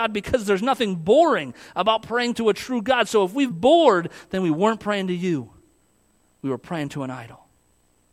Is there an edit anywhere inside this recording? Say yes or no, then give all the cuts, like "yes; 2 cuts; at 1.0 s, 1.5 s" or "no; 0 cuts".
yes; 1 cut; at 3.5 s